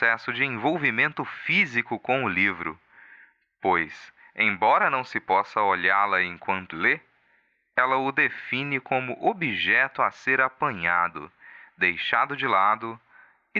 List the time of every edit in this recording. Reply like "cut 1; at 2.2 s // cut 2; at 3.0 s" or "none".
cut 1; at 6.7 s